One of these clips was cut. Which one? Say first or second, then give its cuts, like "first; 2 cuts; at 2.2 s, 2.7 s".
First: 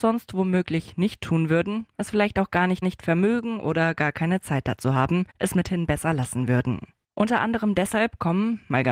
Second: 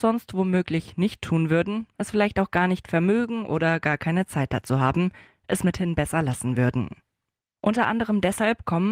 first; 3 cuts; at 2.8 s, 5.3 s, 7.0 s